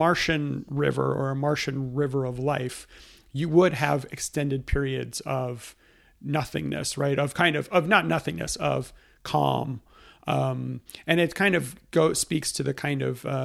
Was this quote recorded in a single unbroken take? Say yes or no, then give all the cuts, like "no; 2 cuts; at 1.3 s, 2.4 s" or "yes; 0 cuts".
yes; 0 cuts